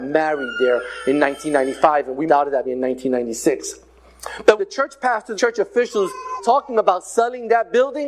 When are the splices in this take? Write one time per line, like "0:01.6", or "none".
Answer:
0:02.3
0:02.6
0:04.6
0:05.3
0:06.4